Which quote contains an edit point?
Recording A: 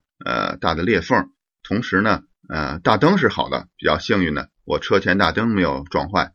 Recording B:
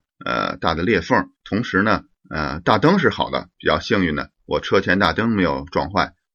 B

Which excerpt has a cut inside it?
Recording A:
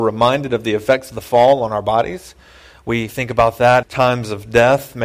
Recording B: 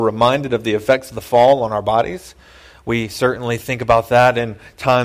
A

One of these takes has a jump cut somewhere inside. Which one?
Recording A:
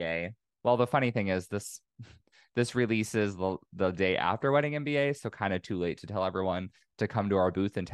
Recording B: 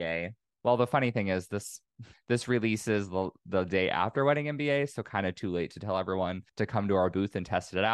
B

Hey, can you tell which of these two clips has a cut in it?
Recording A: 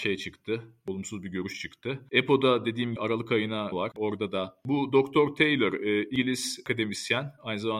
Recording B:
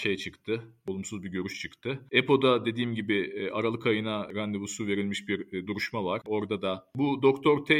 A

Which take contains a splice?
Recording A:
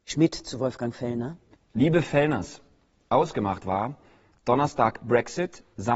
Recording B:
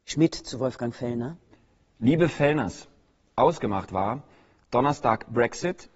A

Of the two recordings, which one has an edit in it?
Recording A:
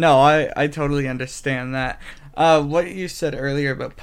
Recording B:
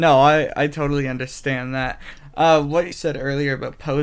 B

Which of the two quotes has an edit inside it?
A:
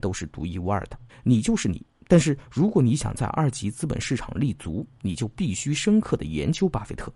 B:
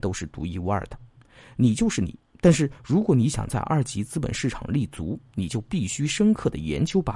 A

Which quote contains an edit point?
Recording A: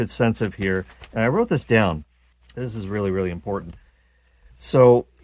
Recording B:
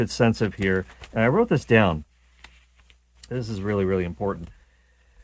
A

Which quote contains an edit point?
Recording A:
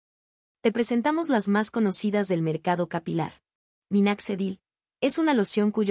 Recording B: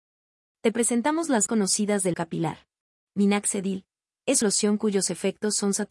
B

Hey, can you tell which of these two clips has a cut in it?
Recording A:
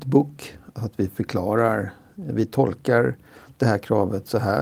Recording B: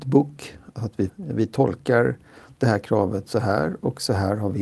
B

